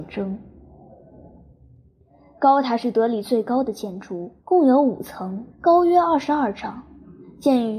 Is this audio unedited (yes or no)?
no